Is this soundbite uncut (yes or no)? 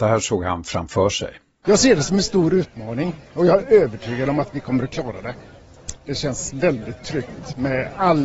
yes